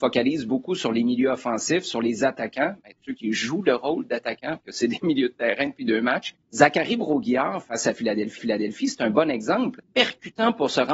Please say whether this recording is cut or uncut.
cut